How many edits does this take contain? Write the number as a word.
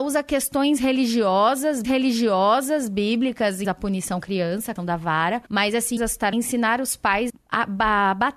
eight